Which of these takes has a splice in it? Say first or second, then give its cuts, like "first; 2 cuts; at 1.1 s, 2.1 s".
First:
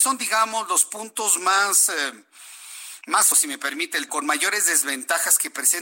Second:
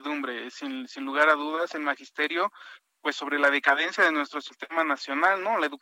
first; 2 cuts; at 3.3 s, 4.1 s